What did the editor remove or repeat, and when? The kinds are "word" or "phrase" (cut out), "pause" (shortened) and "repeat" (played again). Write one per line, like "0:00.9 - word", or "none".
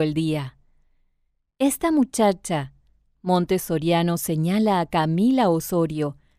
none